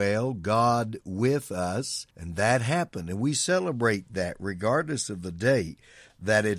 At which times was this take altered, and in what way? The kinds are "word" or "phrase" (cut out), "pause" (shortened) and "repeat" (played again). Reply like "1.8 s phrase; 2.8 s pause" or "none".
2.1 s pause